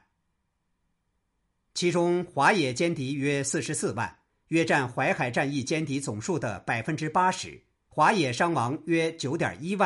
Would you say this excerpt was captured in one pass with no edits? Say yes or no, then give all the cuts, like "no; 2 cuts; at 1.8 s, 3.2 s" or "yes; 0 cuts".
no; 1 cut; at 7.7 s